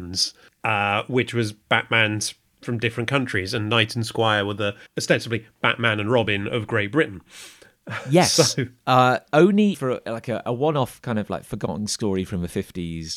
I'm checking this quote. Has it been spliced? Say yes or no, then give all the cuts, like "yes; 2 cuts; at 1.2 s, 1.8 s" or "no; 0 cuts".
yes; 3 cuts; at 1.6 s, 4.9 s, 9.7 s